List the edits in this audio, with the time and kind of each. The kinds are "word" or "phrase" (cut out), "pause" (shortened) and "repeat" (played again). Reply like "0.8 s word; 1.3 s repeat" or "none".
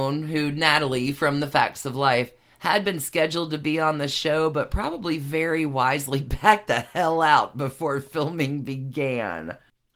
none